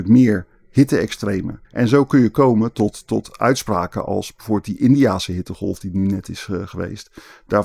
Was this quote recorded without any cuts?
no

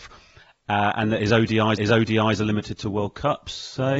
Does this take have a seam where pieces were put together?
yes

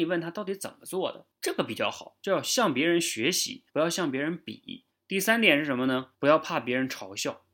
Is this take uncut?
no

